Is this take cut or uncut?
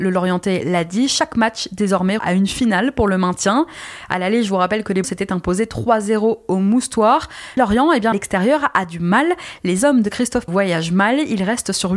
cut